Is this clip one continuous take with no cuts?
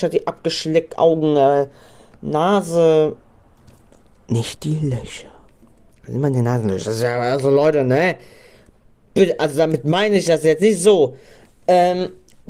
yes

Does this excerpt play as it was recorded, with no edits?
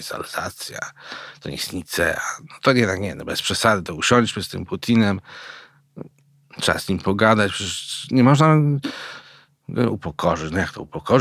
yes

